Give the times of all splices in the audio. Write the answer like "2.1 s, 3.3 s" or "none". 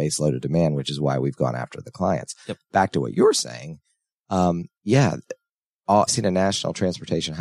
4.7 s, 6.1 s

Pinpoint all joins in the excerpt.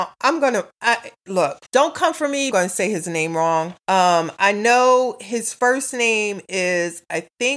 1.7 s, 2.5 s, 3.8 s

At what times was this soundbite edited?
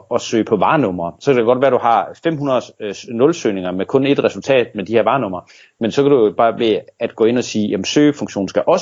none

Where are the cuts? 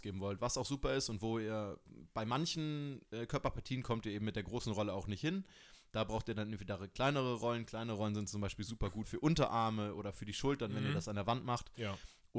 9.0 s

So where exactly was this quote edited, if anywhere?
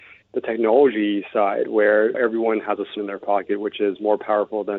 2.1 s, 3.0 s

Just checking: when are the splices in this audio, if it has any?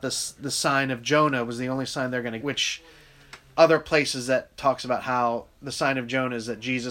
2.4 s

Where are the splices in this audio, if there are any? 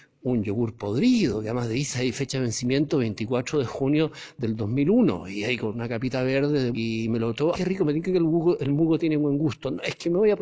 6.7 s, 7.5 s

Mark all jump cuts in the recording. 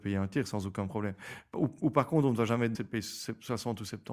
2.7 s

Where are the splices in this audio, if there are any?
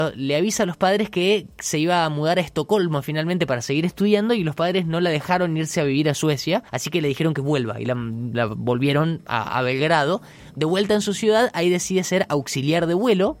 6.7 s

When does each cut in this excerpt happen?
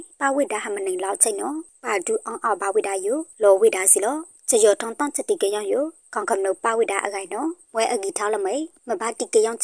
none

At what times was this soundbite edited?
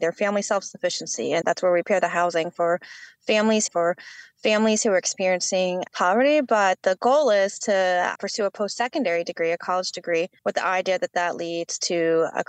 1.4 s, 3.7 s, 5.9 s, 8.1 s, 10.4 s

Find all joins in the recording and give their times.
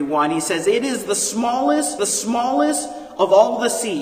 2.0 s

